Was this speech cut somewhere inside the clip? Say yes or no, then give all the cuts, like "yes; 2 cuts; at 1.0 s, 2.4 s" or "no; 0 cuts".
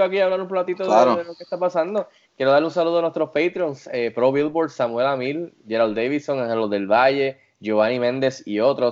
no; 0 cuts